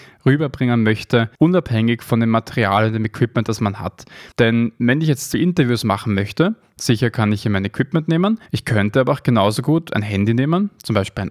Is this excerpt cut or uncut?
cut